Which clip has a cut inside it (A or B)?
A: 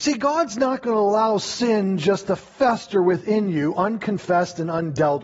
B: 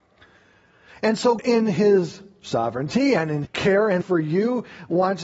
B